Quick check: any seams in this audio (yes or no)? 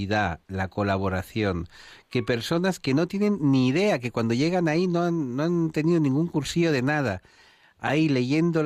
no